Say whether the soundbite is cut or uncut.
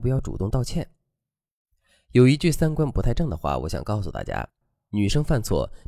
uncut